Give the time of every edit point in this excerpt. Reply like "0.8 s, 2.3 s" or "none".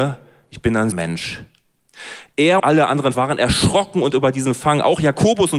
0.9 s, 2.6 s, 3.1 s, 4.1 s